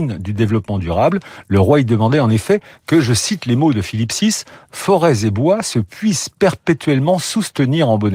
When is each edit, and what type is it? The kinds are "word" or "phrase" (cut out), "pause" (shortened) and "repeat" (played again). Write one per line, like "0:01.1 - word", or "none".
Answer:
none

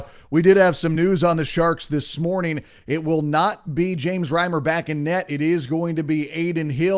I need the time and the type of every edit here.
none

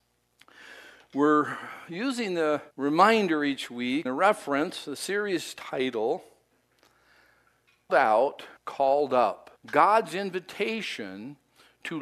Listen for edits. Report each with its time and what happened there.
0:02.7 - pause
0:04.1 - word
0:07.9 - word
0:08.6 - pause
0:09.6 - pause

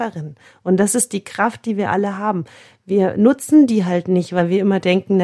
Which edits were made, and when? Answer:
none

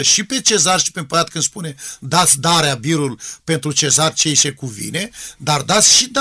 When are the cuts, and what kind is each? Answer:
none

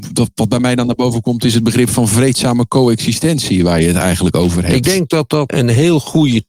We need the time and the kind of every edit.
0:05.5 - word

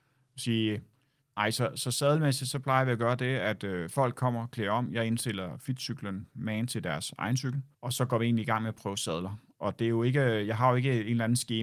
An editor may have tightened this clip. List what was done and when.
0:01.2 - pause
0:07.7 - pause

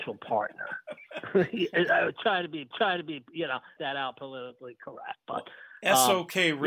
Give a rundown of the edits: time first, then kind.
0:02.7 - repeat
0:03.8 - phrase
0:05.2 - pause

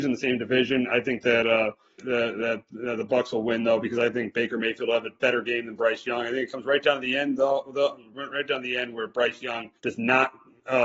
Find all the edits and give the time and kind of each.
0:02.0 - word
0:09.8 - pause

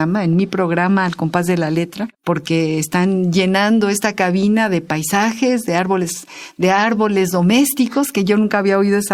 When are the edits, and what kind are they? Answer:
0:02.1 - pause

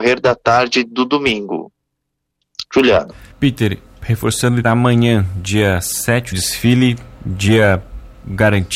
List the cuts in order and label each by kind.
0:03.3 - pause
0:04.6 - word
0:06.3 - phrase

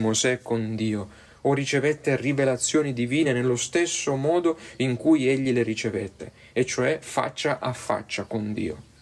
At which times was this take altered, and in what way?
none

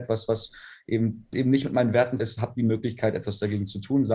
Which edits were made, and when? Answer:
0:01.3 - word
0:02.2 - word

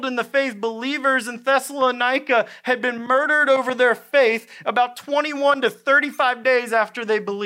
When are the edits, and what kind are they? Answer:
none

